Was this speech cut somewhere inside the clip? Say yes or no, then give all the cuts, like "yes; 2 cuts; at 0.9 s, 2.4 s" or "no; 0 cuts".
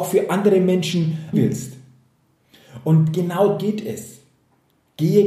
yes; 2 cuts; at 1.3 s, 3.6 s